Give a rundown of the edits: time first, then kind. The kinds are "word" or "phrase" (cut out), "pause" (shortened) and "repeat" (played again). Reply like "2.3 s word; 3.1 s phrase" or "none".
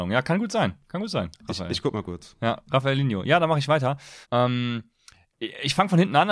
4.2 s pause